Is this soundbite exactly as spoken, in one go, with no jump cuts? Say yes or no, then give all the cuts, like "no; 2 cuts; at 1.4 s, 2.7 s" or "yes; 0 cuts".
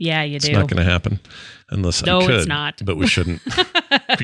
no; 2 cuts; at 1.6 s, 2.0 s